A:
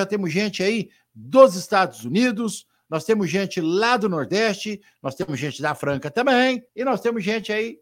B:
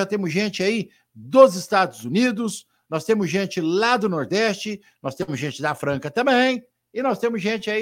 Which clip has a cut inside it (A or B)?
A